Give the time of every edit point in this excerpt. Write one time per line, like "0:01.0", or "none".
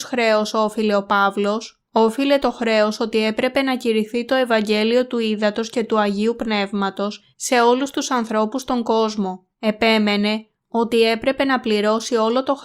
0:01.9
0:07.3
0:09.5